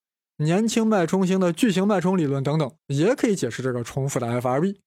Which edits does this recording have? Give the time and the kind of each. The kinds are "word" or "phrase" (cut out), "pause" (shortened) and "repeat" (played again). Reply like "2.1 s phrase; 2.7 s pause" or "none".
2.8 s pause